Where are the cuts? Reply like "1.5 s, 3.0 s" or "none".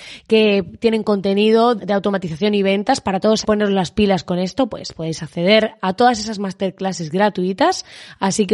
1.8 s, 3.4 s